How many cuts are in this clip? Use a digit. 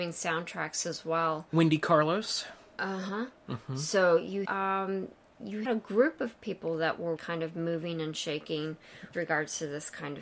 4